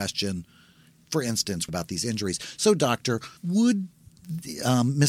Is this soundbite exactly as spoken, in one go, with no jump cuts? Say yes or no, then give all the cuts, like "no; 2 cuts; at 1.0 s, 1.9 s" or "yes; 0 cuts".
no; 2 cuts; at 1.7 s, 3.4 s